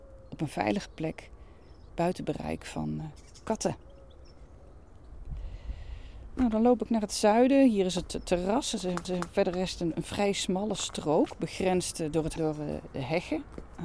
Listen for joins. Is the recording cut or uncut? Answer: cut